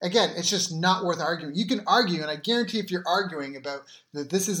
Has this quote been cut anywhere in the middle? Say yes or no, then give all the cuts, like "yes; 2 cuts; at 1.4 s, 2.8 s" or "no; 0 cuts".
no; 0 cuts